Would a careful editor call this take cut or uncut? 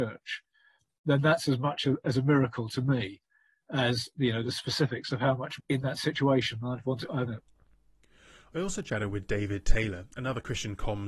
cut